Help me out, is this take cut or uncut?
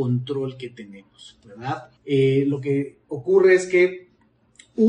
cut